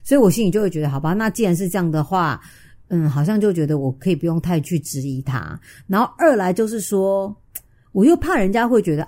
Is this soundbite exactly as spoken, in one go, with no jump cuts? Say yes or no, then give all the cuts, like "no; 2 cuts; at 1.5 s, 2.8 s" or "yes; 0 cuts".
yes; 0 cuts